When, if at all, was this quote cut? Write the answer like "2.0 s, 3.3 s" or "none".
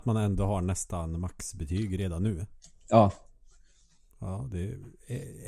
none